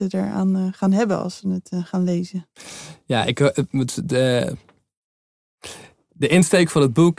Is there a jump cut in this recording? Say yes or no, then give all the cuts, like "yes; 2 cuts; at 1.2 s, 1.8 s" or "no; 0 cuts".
no; 0 cuts